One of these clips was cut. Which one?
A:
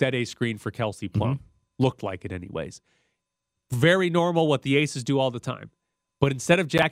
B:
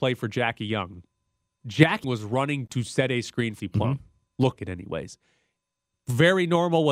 B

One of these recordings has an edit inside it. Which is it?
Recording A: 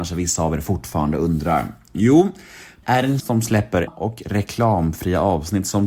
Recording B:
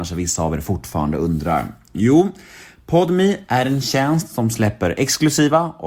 A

